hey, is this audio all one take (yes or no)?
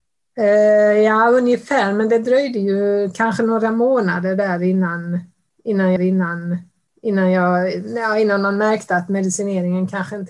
no